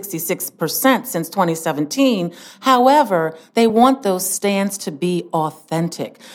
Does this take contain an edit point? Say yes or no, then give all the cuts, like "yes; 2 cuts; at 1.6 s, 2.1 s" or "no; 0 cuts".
no; 0 cuts